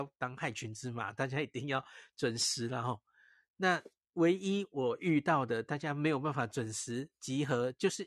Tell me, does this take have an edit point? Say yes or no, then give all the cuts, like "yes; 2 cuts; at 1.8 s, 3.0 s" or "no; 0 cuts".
no; 0 cuts